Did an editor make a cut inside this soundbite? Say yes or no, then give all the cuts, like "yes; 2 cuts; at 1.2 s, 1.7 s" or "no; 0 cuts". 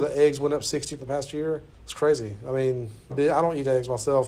yes; 3 cuts; at 1.0 s, 1.7 s, 3.1 s